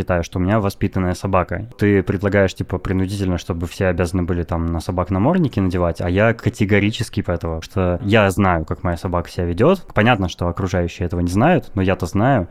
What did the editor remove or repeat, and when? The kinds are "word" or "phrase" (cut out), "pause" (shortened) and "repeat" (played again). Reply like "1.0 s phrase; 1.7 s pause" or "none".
7.2 s word; 7.6 s word